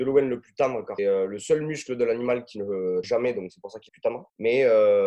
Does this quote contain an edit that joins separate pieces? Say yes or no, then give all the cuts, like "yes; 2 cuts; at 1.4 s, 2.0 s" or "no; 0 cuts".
yes; 3 cuts; at 1.0 s, 3.0 s, 3.9 s